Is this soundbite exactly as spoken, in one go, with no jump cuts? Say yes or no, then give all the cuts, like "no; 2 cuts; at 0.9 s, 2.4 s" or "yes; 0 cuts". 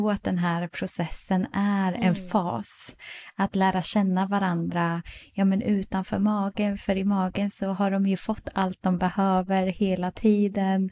yes; 0 cuts